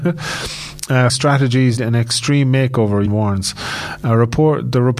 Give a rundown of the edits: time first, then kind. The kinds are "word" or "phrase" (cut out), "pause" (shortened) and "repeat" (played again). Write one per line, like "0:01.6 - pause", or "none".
0:01.1 - word
0:01.8 - word
0:03.1 - word